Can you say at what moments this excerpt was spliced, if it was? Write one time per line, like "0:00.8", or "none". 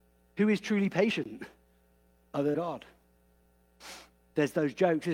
0:02.5